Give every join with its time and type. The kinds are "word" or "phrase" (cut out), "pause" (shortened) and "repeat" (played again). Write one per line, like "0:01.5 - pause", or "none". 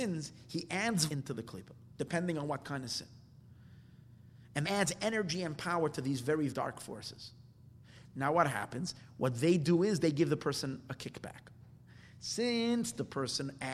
0:01.1 - word
0:04.6 - word
0:06.5 - word